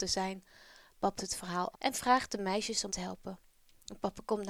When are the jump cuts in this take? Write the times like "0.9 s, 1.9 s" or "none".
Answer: 1.2 s, 1.7 s, 2.9 s